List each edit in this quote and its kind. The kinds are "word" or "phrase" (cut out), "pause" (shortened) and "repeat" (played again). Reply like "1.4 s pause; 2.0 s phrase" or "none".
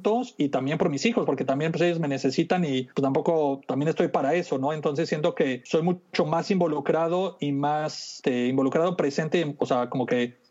none